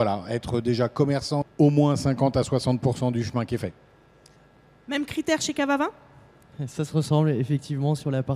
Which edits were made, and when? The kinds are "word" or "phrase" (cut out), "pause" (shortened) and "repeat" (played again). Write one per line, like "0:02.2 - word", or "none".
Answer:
0:01.4 - phrase